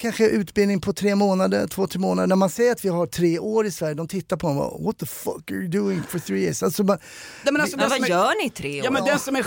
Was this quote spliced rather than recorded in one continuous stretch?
no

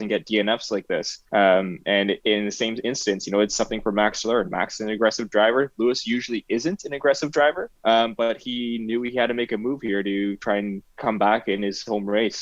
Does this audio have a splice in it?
yes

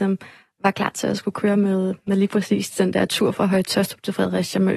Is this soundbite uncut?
yes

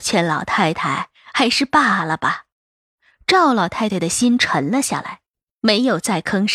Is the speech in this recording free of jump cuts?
no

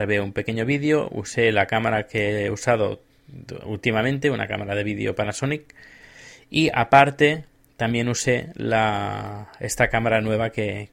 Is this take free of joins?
yes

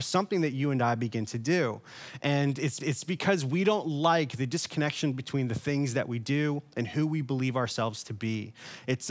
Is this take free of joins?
no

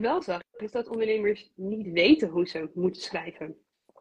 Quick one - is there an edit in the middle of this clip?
no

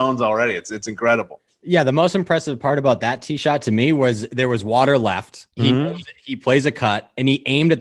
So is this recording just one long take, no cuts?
no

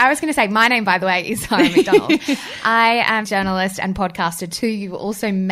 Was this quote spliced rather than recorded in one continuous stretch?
yes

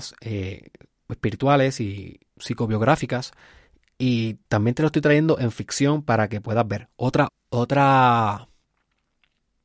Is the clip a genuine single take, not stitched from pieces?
no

